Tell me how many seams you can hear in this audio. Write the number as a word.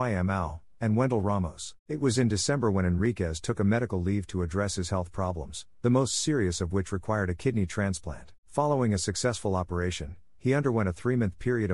two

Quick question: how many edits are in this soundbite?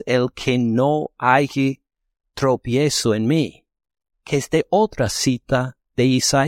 zero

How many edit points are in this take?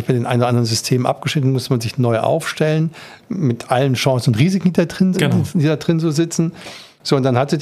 one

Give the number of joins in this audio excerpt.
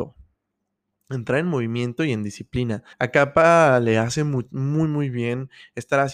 one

